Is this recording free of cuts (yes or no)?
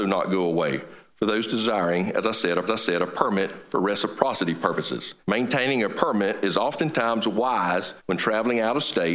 no